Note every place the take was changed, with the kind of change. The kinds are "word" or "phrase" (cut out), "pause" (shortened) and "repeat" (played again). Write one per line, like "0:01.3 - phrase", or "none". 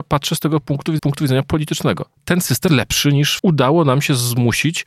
0:01.0 - word
0:02.7 - word
0:03.4 - word